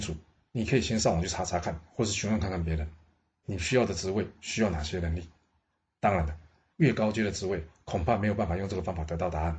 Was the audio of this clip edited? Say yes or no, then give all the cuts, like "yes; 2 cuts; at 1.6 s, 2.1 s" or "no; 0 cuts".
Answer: no; 0 cuts